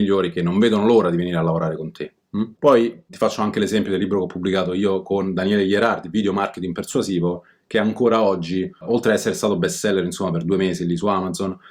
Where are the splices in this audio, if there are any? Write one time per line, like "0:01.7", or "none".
none

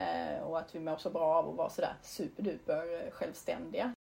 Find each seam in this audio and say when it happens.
none

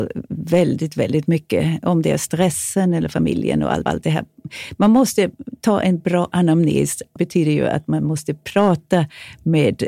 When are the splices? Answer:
0:03.9
0:07.2

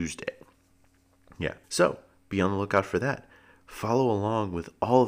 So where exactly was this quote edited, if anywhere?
0:01.6

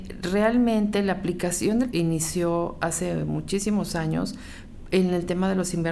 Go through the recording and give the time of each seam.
0:01.9

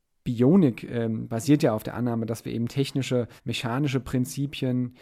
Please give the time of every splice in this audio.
0:03.4

